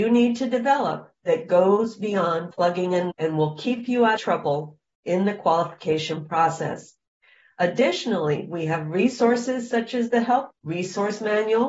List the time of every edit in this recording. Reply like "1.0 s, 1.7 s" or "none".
2.5 s, 3.1 s, 4.2 s, 10.5 s